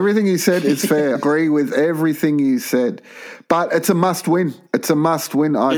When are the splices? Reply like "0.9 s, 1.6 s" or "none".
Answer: 1.1 s, 4.7 s